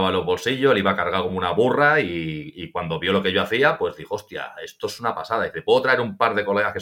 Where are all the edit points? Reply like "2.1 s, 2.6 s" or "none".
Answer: none